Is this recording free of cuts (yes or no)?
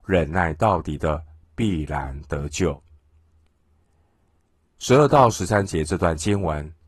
yes